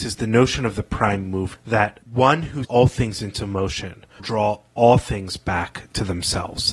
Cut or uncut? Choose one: cut